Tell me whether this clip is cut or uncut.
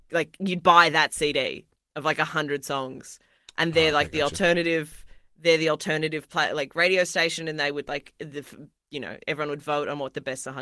uncut